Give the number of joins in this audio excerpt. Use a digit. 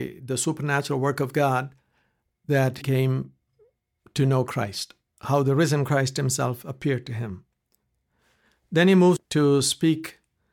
2